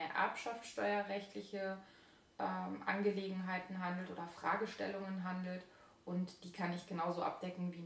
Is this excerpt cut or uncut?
uncut